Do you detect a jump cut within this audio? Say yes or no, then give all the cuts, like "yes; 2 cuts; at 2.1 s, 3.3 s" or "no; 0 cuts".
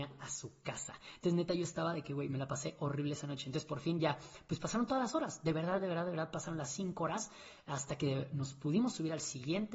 no; 0 cuts